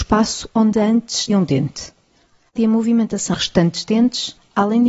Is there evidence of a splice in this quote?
yes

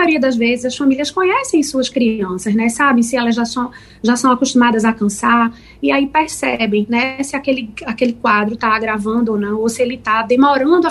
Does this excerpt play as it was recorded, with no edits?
yes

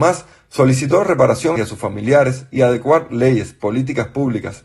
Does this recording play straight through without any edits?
no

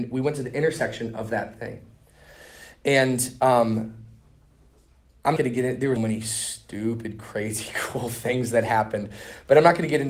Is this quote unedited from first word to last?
no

